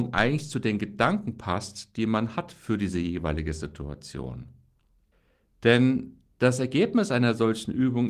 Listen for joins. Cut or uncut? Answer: uncut